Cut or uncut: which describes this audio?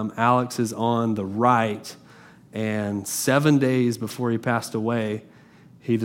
uncut